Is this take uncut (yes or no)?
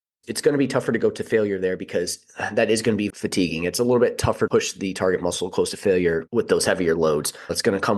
no